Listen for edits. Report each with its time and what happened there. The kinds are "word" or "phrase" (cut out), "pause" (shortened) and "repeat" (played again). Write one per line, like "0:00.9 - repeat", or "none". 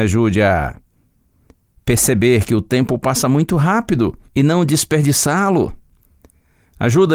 0:04.2 - pause